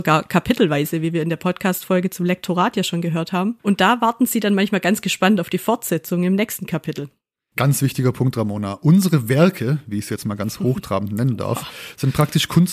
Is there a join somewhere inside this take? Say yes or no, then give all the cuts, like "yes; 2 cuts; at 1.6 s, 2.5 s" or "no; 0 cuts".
no; 0 cuts